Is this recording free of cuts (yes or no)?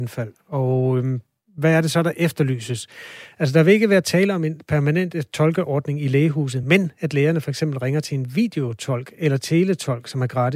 yes